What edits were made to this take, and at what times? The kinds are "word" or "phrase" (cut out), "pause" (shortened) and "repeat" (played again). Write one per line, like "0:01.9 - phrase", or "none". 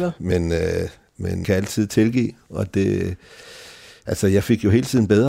0:01.4 - phrase